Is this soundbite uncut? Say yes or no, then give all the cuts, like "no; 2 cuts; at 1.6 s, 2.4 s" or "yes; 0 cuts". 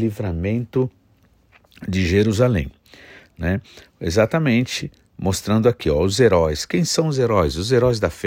yes; 0 cuts